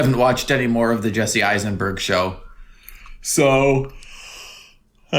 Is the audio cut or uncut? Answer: uncut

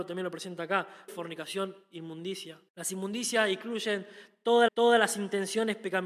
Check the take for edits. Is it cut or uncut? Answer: cut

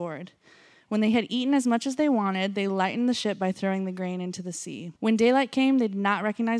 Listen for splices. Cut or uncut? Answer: cut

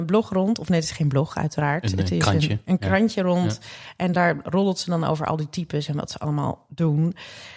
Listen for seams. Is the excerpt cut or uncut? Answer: uncut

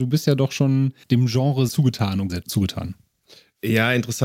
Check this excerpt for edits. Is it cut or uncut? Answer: cut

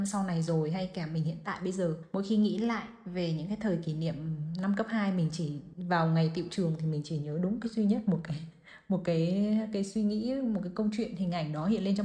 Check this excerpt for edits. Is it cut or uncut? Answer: uncut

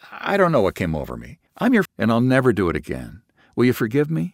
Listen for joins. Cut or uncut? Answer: cut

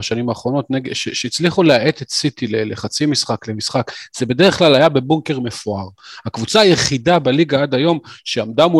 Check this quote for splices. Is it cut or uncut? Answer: uncut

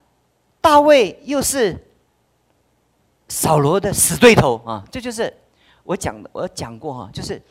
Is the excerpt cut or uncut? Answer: uncut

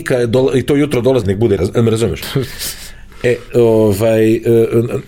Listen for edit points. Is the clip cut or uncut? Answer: cut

